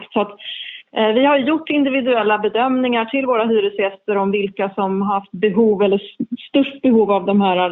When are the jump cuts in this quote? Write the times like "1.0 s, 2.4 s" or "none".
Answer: none